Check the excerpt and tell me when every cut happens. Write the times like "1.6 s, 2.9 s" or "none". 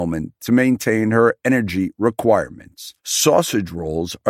3.0 s